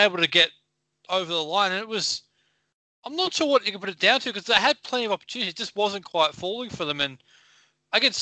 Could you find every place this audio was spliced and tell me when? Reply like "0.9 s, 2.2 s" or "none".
none